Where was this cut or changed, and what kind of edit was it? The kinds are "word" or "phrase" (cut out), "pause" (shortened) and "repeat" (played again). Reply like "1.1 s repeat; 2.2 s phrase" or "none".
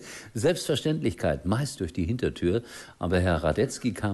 1.8 s phrase